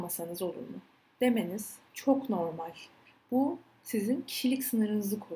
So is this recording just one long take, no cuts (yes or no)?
no